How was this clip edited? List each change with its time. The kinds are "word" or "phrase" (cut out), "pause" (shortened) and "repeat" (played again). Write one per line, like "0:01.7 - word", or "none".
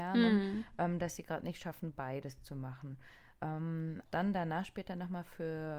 0:04.1 - word